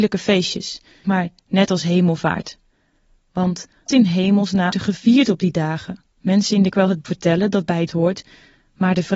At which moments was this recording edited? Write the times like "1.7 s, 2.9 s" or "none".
1.0 s, 3.9 s, 4.7 s, 6.1 s, 6.7 s, 7.0 s, 7.9 s